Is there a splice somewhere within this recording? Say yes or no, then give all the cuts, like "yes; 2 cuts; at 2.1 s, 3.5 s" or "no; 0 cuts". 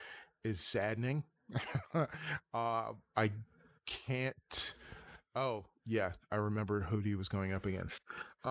no; 0 cuts